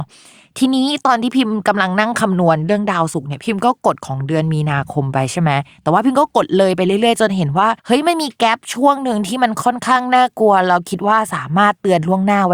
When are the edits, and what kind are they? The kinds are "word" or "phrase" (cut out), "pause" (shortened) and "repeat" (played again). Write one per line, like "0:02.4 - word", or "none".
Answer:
0:07.8 - pause